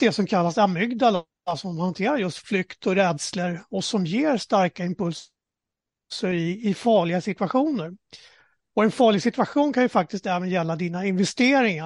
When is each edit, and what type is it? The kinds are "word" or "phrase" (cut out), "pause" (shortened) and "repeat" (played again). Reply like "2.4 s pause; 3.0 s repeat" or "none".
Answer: none